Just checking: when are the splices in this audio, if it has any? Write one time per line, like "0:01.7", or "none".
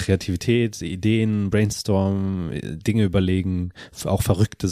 none